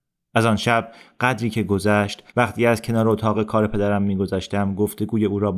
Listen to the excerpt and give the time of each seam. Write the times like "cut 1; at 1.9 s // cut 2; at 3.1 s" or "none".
cut 1; at 2.3 s